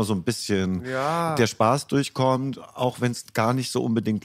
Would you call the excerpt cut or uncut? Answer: uncut